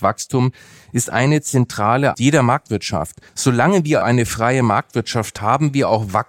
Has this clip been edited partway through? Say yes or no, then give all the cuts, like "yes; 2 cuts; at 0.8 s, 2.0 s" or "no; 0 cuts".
yes; 4 cuts; at 2.1 s, 3.3 s, 4.0 s, 5.4 s